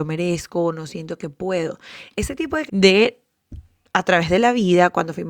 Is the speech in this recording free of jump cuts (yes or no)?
no